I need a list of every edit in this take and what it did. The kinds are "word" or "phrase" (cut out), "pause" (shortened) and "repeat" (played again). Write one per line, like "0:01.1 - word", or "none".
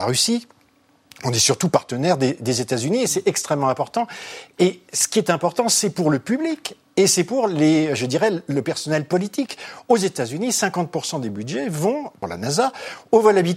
none